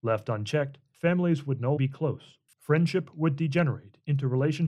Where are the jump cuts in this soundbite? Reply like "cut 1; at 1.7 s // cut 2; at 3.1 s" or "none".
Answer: cut 1; at 1.8 s

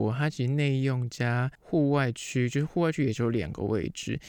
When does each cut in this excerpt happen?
cut 1; at 1.5 s

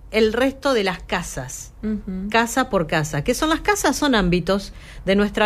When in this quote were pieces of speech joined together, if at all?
none

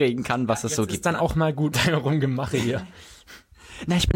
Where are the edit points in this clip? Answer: cut 1; at 1.7 s

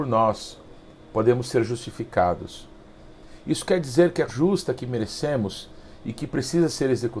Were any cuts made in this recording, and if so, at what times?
cut 1; at 4.3 s

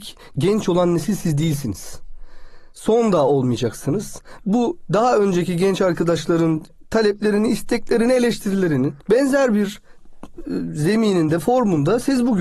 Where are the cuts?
cut 1; at 9.0 s

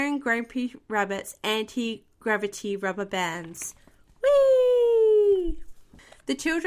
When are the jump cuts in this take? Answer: none

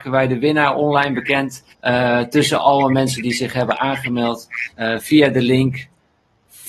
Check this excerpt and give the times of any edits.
cut 1; at 1.7 s // cut 2; at 4.7 s

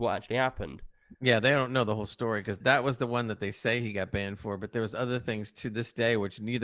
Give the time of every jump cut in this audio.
cut 1; at 2.6 s

